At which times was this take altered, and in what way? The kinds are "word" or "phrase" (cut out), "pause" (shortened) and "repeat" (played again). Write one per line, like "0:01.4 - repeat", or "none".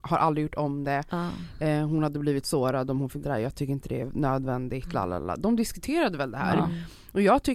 0:02.4 - word
0:03.2 - word